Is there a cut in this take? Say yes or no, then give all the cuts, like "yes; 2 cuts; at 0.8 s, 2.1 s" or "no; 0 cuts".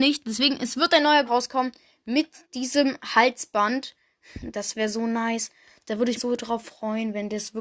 yes; 3 cuts; at 1.3 s, 2.4 s, 6.2 s